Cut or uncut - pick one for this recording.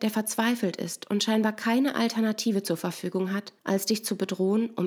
cut